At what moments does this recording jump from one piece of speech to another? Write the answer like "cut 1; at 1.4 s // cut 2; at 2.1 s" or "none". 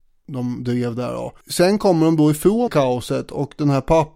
cut 1; at 1.4 s // cut 2; at 2.7 s